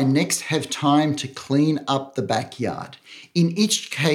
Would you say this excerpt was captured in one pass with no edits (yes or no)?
yes